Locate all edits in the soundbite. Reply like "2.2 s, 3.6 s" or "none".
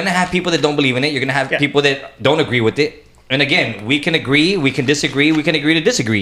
none